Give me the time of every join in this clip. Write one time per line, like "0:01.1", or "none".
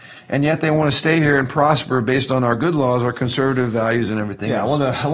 none